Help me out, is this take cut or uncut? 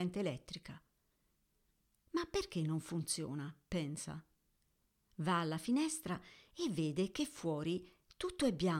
uncut